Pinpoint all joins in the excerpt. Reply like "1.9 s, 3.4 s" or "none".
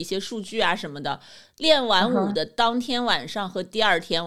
none